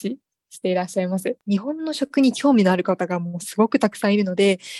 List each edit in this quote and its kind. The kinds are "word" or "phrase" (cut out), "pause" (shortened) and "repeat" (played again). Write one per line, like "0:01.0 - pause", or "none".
0:01.4 - pause